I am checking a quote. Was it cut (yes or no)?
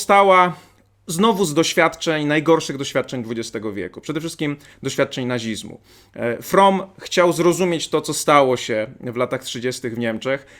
no